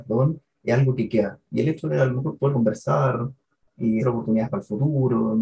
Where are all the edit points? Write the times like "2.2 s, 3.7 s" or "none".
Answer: 2.5 s, 4.0 s